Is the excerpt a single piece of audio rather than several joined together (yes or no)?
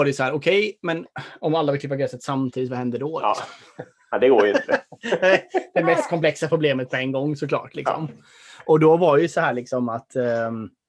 yes